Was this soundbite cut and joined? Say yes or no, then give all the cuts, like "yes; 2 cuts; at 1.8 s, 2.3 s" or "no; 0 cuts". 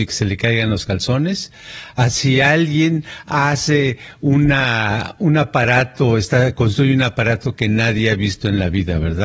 no; 0 cuts